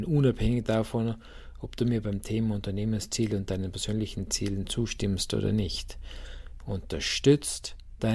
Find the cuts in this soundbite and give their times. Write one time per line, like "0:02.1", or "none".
none